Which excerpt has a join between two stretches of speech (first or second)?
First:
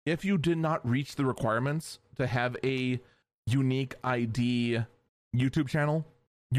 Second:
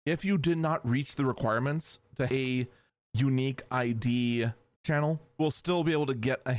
second